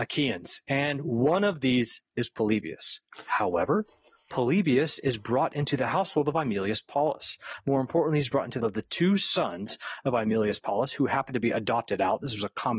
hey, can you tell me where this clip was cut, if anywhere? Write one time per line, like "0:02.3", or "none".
0:08.6